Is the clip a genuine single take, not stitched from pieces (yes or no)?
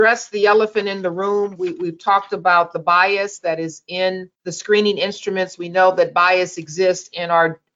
no